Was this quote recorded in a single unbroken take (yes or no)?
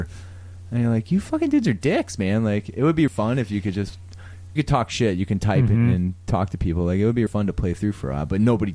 no